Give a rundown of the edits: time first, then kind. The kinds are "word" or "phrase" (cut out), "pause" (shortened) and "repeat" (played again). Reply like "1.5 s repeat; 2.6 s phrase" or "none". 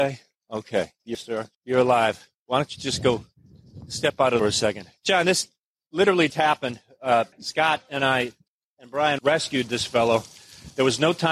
1.1 s word; 1.5 s pause; 4.4 s phrase; 5.0 s pause; 6.3 s word; 7.3 s pause; 8.5 s pause; 9.2 s phrase